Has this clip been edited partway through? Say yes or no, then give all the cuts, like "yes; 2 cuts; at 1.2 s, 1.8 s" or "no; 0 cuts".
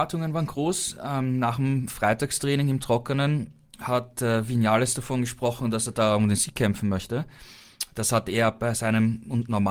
no; 0 cuts